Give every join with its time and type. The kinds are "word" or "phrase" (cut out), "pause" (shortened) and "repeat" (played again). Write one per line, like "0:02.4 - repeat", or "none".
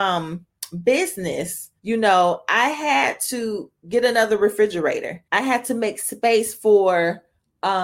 0:01.8 - pause
0:05.3 - pause